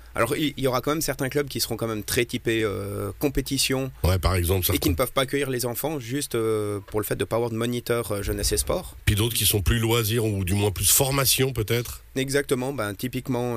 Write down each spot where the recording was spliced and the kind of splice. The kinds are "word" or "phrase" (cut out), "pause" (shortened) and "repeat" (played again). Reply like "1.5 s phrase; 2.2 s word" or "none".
none